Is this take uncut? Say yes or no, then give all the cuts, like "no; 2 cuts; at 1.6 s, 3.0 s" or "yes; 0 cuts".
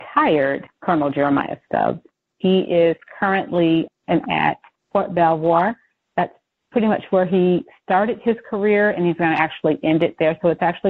no; 1 cut; at 4.2 s